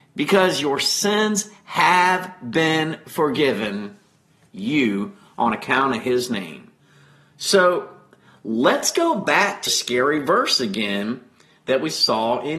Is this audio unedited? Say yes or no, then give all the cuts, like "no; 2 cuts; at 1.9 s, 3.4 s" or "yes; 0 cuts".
no; 1 cut; at 9.7 s